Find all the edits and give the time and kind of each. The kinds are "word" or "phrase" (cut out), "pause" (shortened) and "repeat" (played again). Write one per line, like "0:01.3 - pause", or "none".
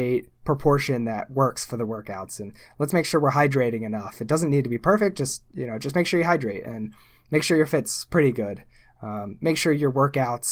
none